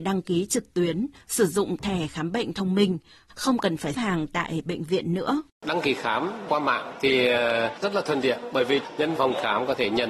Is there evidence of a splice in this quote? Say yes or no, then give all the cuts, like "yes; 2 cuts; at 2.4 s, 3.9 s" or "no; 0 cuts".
yes; 3 cuts; at 3.9 s, 5.5 s, 9.2 s